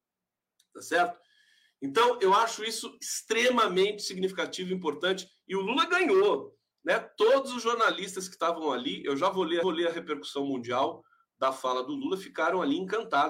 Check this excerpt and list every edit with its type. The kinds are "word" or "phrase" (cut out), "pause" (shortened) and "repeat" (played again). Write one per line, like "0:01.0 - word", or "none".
0:09.6 - repeat